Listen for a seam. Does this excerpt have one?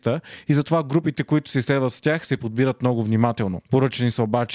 no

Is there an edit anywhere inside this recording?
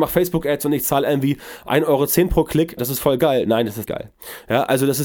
yes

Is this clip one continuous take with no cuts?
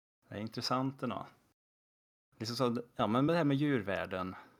yes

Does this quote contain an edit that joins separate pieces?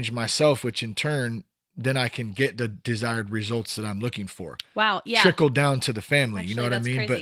no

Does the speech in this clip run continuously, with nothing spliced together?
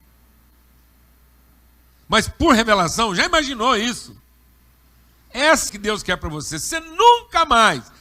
no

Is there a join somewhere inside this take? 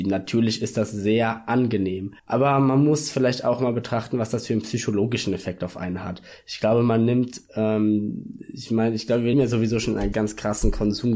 yes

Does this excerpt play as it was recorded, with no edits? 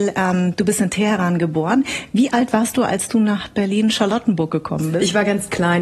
yes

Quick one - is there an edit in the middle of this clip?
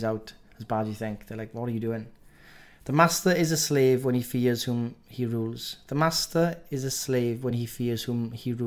no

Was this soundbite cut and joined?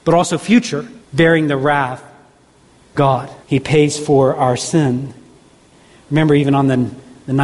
yes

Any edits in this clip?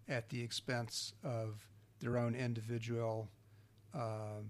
no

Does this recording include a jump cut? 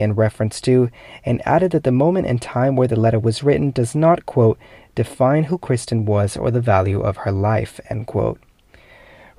no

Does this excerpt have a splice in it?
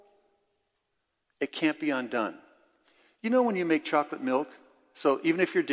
no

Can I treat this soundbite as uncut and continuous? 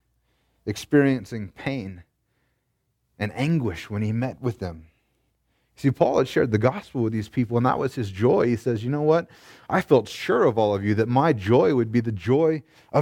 yes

